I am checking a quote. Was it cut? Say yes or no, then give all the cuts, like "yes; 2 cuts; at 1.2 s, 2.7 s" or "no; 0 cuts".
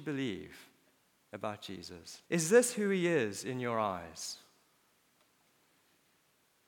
yes; 1 cut; at 2.3 s